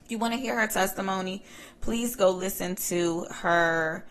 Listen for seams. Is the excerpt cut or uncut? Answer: uncut